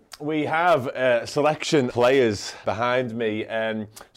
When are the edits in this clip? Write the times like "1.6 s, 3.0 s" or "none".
1.9 s, 2.6 s